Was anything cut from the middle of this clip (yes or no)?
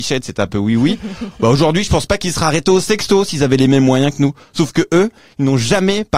no